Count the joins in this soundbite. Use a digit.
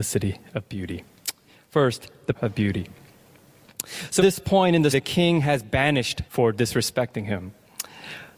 4